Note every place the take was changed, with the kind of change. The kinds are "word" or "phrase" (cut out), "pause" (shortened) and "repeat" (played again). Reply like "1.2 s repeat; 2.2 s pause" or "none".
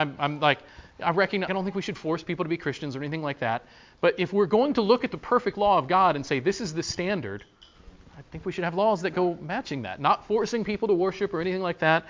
1.5 s word